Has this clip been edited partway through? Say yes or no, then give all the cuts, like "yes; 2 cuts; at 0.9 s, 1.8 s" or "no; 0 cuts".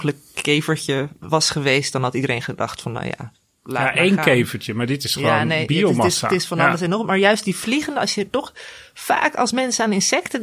no; 0 cuts